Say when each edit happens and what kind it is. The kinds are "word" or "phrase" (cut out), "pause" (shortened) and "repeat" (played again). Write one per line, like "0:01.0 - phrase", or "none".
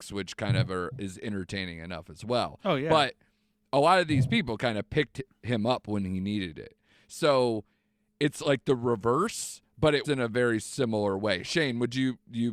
0:10.0 - word